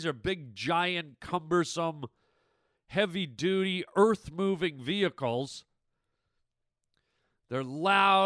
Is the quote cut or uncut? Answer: uncut